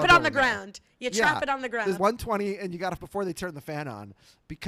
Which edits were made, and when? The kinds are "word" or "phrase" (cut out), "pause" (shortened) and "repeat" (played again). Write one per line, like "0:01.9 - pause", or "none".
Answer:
0:02.0 - word
0:03.0 - word